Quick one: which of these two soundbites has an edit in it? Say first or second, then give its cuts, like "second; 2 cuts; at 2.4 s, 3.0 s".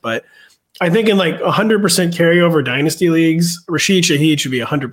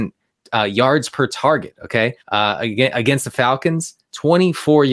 second; 1 cut; at 2.2 s